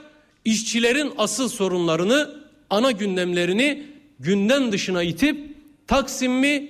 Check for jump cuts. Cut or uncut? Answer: uncut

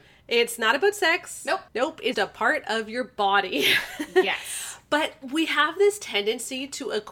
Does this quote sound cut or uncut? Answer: cut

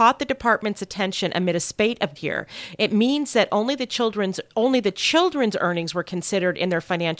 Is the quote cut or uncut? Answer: cut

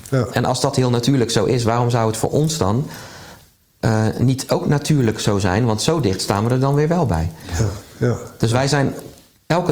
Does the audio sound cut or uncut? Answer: uncut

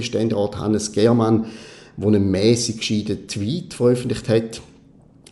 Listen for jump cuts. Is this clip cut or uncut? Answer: uncut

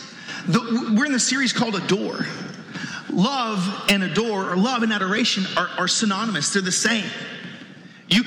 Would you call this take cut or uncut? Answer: uncut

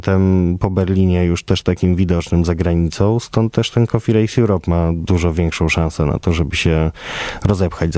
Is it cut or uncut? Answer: uncut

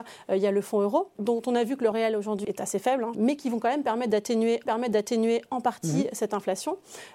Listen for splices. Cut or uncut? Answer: cut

